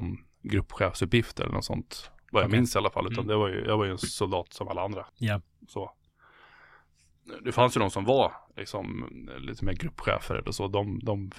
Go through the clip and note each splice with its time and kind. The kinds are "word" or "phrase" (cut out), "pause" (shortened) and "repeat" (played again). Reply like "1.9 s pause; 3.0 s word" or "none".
5.1 s pause; 8.5 s pause

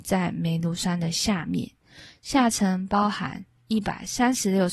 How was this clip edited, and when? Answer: none

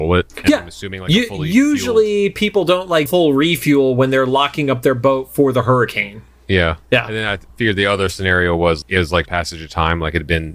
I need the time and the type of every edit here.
3.1 s phrase; 6.8 s pause; 8.8 s word; 9.3 s phrase

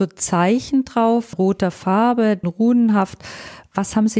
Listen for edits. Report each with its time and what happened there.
1.3 s phrase; 2.4 s phrase

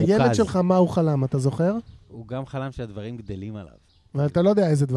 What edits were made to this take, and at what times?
2.0 s pause

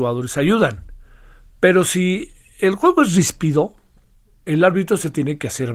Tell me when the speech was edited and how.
none

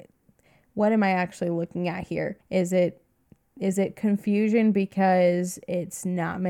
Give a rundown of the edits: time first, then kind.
2.4 s pause

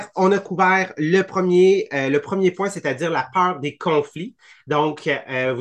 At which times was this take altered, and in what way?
none

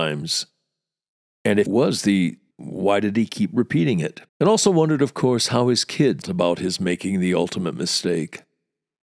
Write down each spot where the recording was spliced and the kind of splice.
1.7 s word; 2.5 s phrase; 4.3 s pause; 6.2 s word

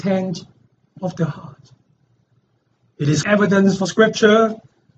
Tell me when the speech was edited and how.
3.2 s word; 3.9 s word

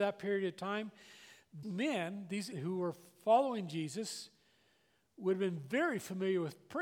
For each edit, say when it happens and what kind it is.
1.6 s word; 2.5 s word

